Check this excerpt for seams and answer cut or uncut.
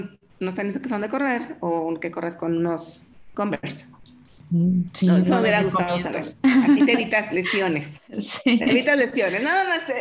uncut